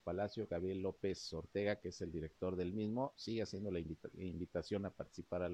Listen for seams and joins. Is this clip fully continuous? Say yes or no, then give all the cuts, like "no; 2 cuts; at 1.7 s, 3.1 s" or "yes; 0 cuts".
yes; 0 cuts